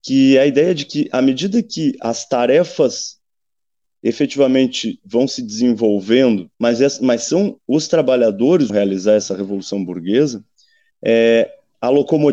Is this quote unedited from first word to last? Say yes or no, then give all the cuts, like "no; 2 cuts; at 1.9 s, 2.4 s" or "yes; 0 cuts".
no; 2 cuts; at 6.5 s, 8.7 s